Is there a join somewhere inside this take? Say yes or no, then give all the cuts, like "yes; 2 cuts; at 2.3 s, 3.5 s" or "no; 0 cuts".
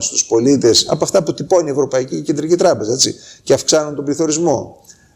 no; 0 cuts